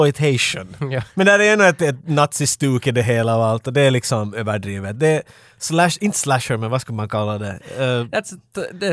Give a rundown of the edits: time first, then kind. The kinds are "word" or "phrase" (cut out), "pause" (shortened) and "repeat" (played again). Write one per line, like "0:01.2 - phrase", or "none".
none